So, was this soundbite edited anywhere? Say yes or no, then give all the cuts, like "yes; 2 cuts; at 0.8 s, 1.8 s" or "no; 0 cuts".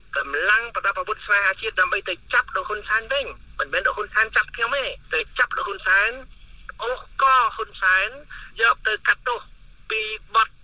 yes; 2 cuts; at 5.0 s, 8.5 s